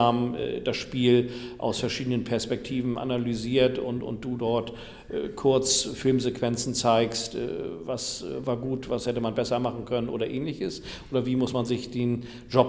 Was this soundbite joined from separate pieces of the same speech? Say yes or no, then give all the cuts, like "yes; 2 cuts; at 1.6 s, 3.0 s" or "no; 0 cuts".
no; 0 cuts